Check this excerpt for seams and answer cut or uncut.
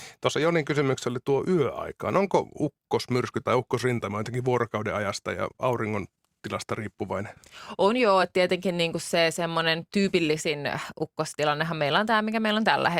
uncut